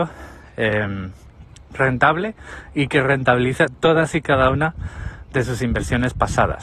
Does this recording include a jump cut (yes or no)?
no